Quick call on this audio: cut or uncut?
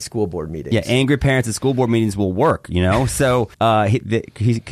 cut